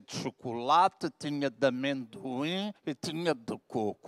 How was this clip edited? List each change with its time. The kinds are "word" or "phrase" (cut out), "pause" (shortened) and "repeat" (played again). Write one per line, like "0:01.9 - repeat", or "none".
0:02.8 - pause